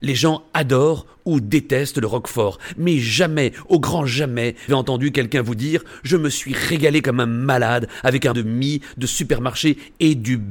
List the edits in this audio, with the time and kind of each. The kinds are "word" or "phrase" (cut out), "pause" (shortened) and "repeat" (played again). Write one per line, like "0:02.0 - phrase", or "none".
0:04.7 - phrase
0:08.3 - phrase